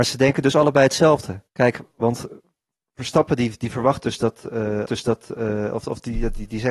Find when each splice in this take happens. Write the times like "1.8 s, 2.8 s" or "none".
1.5 s, 4.8 s